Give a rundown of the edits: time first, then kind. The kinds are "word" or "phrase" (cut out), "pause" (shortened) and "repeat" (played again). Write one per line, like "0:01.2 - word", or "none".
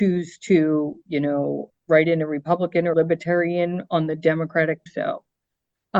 0:01.7 - word
0:02.9 - word
0:04.9 - phrase